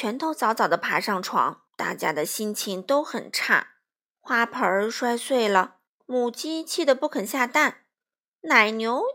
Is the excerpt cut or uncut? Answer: cut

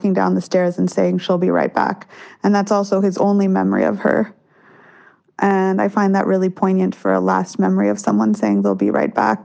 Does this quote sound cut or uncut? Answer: uncut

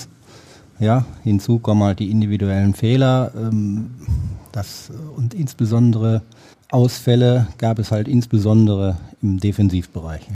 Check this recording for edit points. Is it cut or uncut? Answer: cut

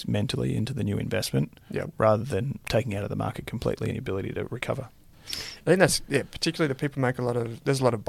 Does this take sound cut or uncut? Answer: cut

